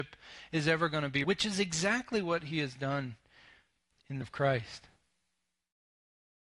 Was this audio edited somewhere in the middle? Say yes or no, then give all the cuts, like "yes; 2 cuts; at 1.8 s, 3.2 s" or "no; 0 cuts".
yes; 2 cuts; at 1.2 s, 4.2 s